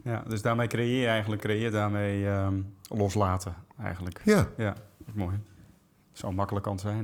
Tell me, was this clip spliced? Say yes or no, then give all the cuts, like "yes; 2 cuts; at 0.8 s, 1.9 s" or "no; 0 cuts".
yes; 1 cut; at 1.4 s